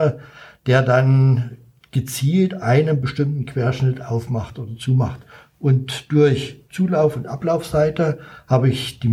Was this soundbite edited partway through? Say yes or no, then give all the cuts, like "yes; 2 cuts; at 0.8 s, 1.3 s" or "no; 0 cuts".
no; 0 cuts